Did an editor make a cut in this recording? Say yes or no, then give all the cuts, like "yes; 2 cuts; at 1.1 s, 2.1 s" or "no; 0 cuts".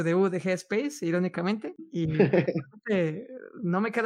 no; 0 cuts